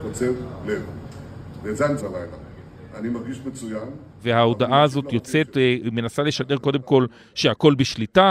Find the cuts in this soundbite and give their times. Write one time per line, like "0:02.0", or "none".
0:02.0
0:04.1